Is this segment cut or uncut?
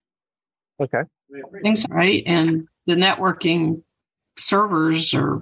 cut